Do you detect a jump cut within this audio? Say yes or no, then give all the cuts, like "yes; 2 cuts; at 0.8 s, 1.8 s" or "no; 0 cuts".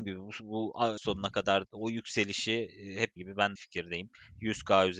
yes; 4 cuts; at 1.0 s, 1.6 s, 3.2 s, 3.5 s